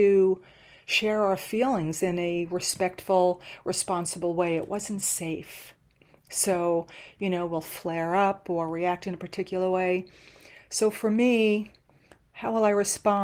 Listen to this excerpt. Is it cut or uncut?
uncut